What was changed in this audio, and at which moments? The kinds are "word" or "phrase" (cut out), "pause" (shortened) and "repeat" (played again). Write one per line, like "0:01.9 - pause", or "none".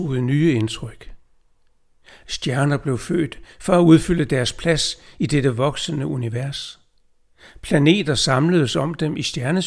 none